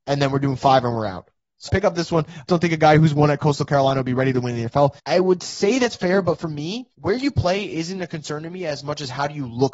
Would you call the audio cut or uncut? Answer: cut